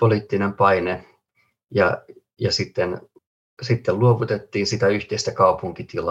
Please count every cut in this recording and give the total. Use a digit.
1